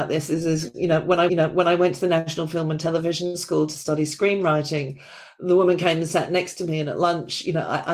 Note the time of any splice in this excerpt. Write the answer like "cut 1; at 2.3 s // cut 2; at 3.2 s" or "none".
cut 1; at 1.3 s